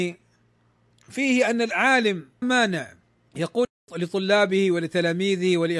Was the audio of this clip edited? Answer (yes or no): yes